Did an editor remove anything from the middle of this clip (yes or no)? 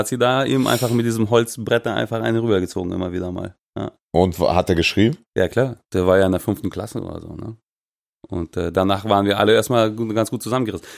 no